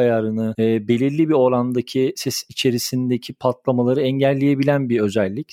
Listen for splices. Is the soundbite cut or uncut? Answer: uncut